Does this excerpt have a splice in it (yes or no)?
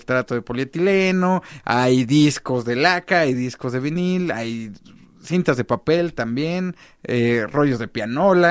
no